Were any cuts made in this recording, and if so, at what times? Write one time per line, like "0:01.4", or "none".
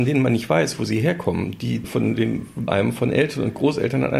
0:02.7